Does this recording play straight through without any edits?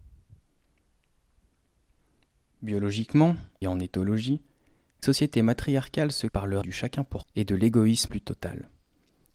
no; 6 cuts; at 3.6 s, 5.0 s, 6.3 s, 6.6 s, 7.2 s, 8.1 s

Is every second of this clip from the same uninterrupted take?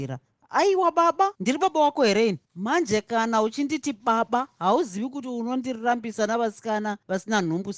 no; 2 cuts; at 1.3 s, 2.4 s

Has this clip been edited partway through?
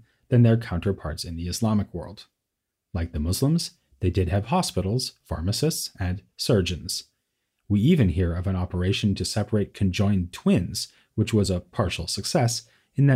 no; 0 cuts

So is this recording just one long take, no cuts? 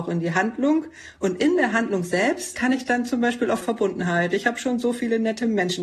no; 1 cut; at 3.6 s

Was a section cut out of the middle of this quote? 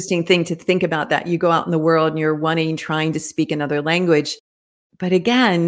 no; 0 cuts

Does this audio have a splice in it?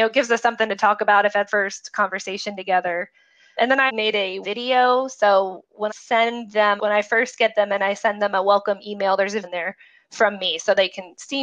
yes; 7 cuts; at 1.5 s, 3.6 s, 3.9 s, 4.4 s, 5.9 s, 6.8 s, 9.4 s

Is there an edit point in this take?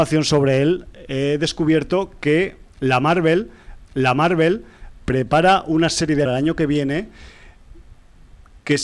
yes; 2 cuts; at 3.8 s, 6.3 s

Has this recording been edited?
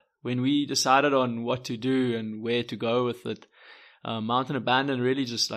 no; 0 cuts

